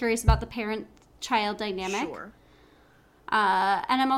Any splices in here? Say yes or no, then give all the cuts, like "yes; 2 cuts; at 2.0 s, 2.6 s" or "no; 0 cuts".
no; 0 cuts